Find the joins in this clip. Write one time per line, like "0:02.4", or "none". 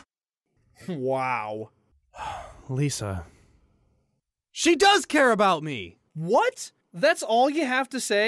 none

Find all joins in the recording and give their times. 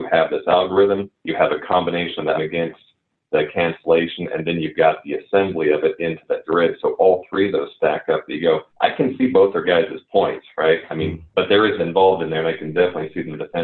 0:01.2
0:02.3
0:06.5
0:08.7
0:11.3
0:11.8

